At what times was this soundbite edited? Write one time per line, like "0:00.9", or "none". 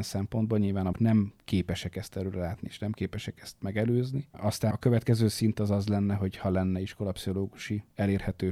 0:00.9
0:04.7